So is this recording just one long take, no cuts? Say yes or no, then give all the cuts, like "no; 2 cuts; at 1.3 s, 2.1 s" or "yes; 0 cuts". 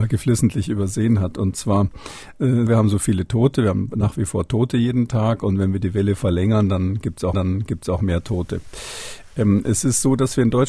no; 2 cuts; at 2.7 s, 7.3 s